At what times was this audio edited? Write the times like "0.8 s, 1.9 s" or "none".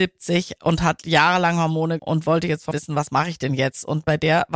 2.0 s, 2.7 s